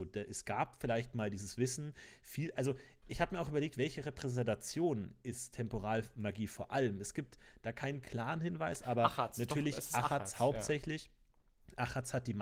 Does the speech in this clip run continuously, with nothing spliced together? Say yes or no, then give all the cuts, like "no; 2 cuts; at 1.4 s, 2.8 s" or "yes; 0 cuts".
yes; 0 cuts